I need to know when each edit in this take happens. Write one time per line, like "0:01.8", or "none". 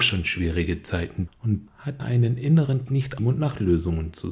0:01.3
0:01.7
0:02.0
0:02.9
0:03.2